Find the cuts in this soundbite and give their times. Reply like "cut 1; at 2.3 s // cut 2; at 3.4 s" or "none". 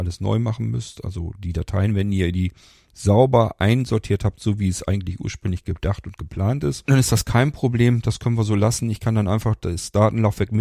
none